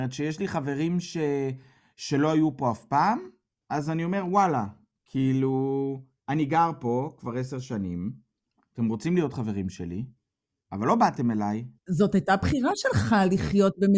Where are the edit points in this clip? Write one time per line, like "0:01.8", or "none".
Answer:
none